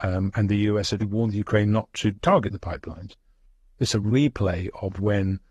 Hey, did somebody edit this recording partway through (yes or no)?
yes